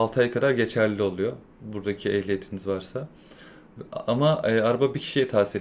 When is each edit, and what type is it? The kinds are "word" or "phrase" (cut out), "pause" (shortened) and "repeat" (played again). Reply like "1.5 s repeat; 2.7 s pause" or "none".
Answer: none